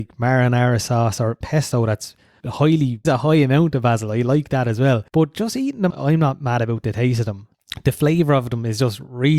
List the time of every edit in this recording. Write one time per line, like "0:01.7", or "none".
0:01.4
0:03.0
0:05.1
0:05.9